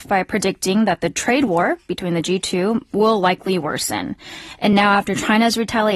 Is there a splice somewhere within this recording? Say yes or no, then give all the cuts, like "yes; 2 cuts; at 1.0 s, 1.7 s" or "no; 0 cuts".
no; 0 cuts